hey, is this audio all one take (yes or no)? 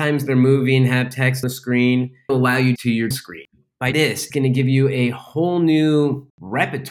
no